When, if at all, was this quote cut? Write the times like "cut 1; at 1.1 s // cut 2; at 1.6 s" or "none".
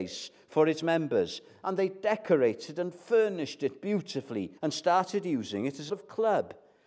cut 1; at 4.6 s // cut 2; at 5.9 s